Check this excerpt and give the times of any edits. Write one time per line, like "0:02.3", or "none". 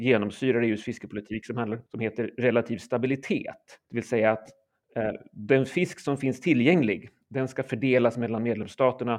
0:01.9
0:03.8